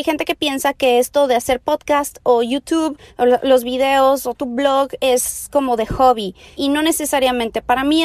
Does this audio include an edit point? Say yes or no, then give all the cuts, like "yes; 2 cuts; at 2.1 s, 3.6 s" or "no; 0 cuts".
yes; 1 cut; at 4.3 s